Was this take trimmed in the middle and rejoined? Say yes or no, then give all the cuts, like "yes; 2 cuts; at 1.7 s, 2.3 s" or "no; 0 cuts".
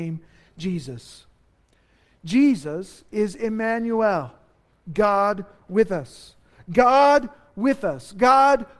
no; 0 cuts